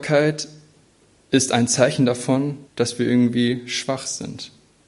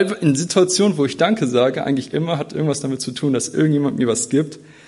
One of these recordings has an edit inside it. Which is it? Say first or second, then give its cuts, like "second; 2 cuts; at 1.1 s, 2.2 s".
first; 1 cut; at 2.7 s